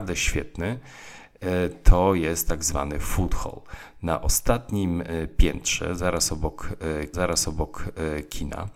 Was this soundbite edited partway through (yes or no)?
yes